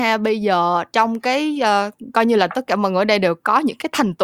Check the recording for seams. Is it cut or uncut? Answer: uncut